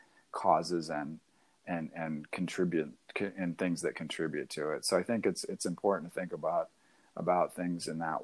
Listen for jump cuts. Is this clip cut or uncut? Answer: uncut